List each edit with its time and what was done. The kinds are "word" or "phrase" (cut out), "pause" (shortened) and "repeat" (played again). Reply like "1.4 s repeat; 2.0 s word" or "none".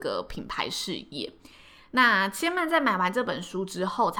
none